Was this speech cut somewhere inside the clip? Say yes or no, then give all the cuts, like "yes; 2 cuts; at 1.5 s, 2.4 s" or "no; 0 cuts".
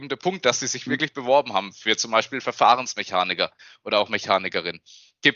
no; 0 cuts